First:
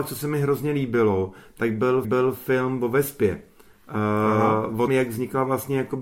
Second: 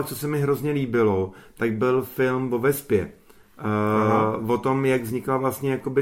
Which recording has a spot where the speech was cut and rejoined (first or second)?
first